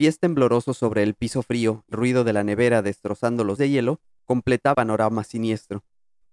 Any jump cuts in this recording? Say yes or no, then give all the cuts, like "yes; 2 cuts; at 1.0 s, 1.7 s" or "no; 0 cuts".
yes; 3 cuts; at 1.9 s, 3.6 s, 4.7 s